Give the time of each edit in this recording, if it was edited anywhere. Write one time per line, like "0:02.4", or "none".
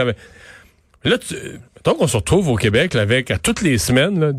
0:01.7